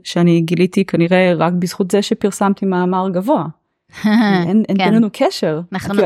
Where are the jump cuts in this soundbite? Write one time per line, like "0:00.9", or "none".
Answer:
none